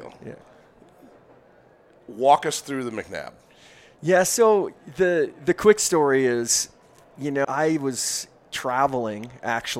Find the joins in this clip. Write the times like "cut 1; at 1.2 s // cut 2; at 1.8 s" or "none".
cut 1; at 7.4 s